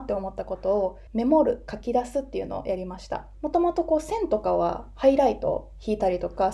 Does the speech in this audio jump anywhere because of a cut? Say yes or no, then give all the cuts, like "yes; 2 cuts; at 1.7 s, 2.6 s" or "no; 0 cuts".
yes; 2 cuts; at 1.1 s, 3.3 s